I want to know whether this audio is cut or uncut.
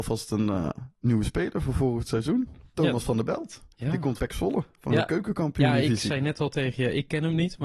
cut